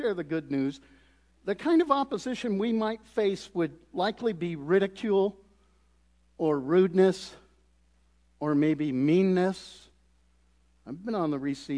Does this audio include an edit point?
no; 0 cuts

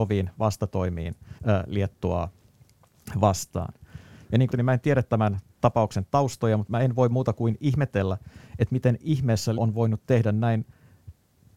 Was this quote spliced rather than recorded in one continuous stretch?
yes; 3 cuts; at 1.4 s, 4.5 s, 9.6 s

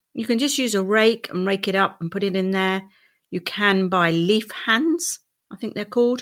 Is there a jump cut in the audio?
no; 0 cuts

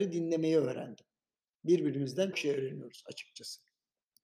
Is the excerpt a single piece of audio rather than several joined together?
no; 1 cut; at 2.3 s

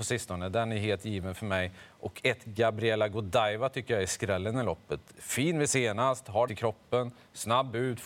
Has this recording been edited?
yes; 2 cuts; at 5.7 s, 6.5 s

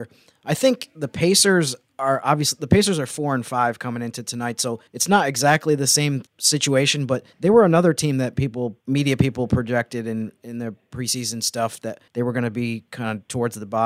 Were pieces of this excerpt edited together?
yes; 5 cuts; at 4.9 s, 6.3 s, 7.3 s, 8.8 s, 12.1 s

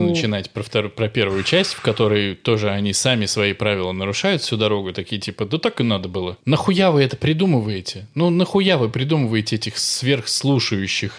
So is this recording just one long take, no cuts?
yes; 0 cuts

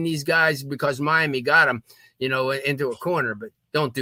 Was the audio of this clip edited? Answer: no; 0 cuts

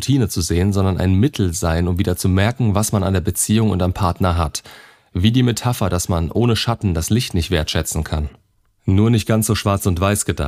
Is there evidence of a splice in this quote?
no; 0 cuts

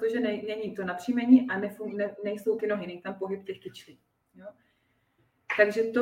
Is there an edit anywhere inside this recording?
yes; 1 cut; at 2.6 s

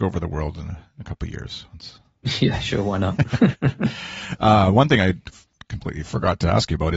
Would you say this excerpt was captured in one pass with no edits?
yes; 0 cuts

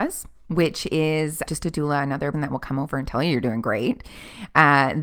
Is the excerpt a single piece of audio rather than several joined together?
no; 2 cuts; at 1.5 s, 2.3 s

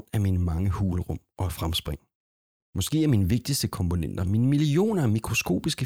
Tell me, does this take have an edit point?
no; 0 cuts

